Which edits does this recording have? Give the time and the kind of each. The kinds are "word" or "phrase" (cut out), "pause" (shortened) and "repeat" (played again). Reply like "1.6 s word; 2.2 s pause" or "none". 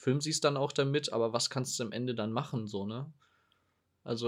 none